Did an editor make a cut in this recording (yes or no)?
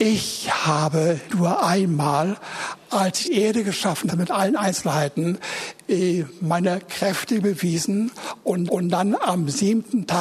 yes